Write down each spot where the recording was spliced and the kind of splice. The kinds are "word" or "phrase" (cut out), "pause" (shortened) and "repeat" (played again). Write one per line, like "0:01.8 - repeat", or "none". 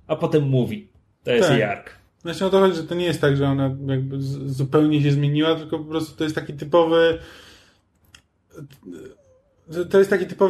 none